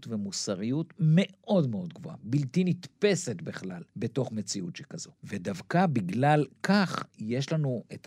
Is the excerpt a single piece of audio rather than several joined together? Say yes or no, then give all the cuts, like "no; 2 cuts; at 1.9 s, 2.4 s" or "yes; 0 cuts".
no; 2 cuts; at 3.9 s, 5.2 s